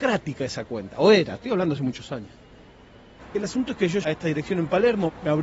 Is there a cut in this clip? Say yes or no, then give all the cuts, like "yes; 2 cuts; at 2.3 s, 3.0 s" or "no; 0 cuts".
yes; 1 cut; at 4.0 s